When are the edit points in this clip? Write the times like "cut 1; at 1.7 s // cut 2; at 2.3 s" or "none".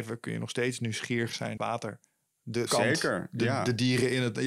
cut 1; at 1.6 s // cut 2; at 2.7 s

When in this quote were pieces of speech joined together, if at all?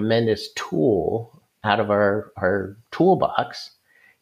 none

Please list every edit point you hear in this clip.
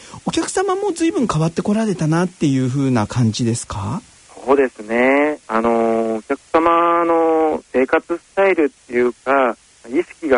cut 1; at 5.4 s // cut 2; at 8.8 s

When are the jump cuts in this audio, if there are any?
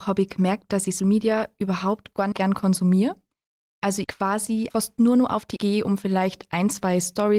cut 1; at 1.0 s // cut 2; at 2.3 s // cut 3; at 4.0 s // cut 4; at 4.7 s // cut 5; at 5.6 s

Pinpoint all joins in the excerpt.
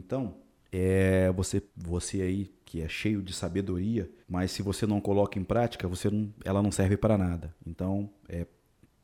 cut 1; at 1.7 s // cut 2; at 4.2 s

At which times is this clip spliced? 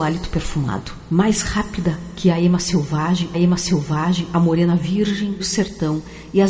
cut 1; at 3.3 s // cut 2; at 5.4 s

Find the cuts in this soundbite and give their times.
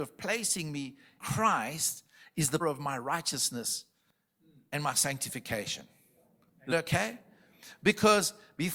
cut 1; at 1.2 s // cut 2; at 2.6 s // cut 3; at 6.7 s

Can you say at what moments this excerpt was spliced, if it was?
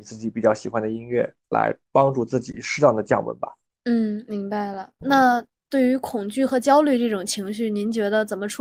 none

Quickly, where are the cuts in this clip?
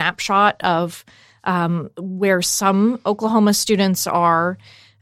none

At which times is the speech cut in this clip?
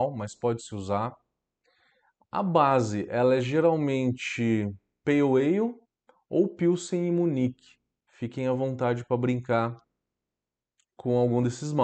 none

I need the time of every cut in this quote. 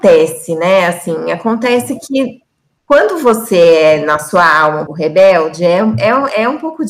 cut 1; at 4.9 s

